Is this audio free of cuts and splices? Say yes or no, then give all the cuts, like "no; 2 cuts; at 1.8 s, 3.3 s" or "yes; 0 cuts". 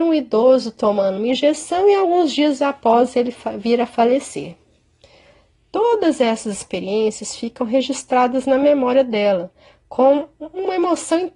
yes; 0 cuts